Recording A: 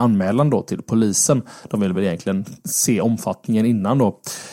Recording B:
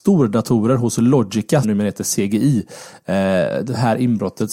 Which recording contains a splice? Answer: B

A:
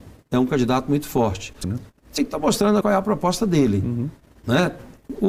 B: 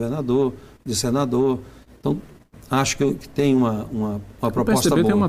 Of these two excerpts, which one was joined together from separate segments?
A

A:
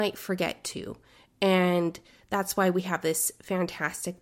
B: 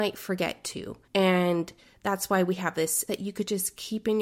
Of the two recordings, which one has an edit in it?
B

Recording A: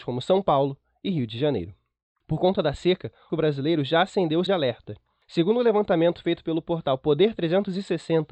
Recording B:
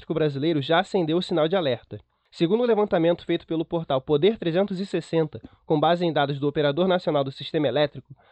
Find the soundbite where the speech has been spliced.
A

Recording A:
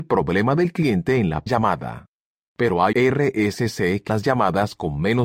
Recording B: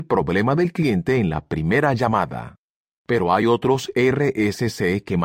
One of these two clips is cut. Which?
A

